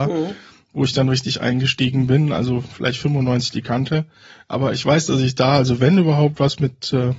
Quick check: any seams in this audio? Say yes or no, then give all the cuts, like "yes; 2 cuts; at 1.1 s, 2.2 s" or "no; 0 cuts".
no; 0 cuts